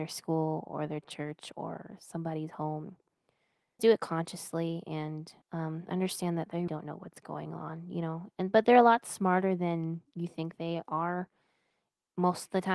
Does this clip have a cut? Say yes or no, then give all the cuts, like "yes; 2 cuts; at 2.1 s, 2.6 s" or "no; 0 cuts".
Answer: yes; 3 cuts; at 3.8 s, 5.4 s, 6.7 s